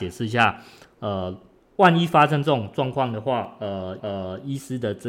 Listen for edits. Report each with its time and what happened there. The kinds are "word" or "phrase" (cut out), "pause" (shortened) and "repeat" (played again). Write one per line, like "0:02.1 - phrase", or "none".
0:04.0 - repeat